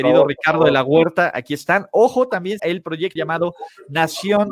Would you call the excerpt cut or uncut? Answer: cut